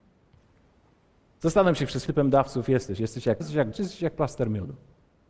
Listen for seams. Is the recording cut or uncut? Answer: cut